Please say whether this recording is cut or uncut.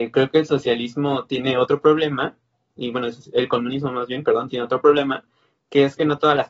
uncut